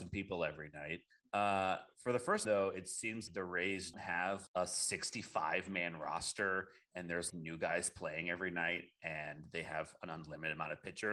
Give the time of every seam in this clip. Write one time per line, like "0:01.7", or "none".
0:01.1
0:02.4
0:03.3
0:03.9
0:04.5
0:07.3